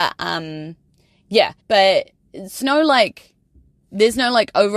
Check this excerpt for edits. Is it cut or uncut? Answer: cut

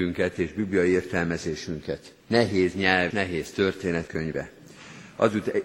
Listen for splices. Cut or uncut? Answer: cut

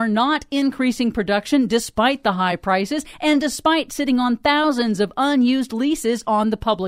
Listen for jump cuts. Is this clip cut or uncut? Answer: uncut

